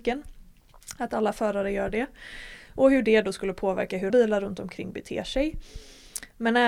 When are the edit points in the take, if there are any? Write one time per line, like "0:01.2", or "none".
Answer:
0:04.1